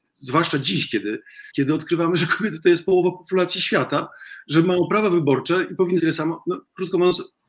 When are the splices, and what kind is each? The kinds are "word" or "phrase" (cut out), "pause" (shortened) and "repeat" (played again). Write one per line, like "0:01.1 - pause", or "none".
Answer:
0:01.5 - pause
0:06.0 - word